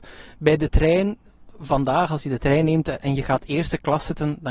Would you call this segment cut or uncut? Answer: uncut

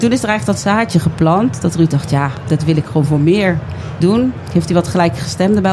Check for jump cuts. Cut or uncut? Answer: cut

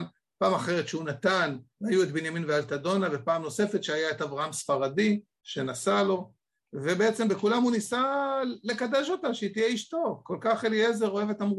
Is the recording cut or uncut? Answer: uncut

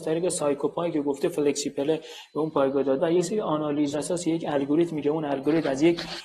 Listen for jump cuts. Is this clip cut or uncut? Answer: cut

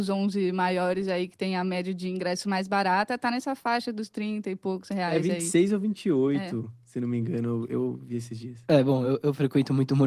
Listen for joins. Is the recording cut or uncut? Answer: uncut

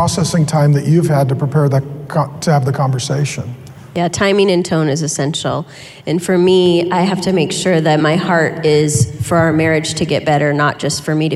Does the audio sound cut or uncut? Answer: uncut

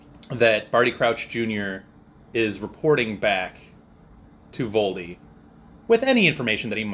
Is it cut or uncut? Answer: uncut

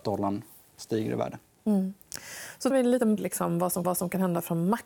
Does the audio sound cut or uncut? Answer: cut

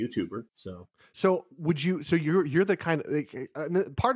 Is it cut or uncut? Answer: uncut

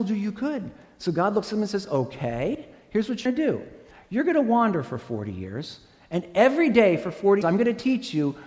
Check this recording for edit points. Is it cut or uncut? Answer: cut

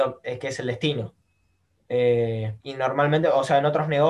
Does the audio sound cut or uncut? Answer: cut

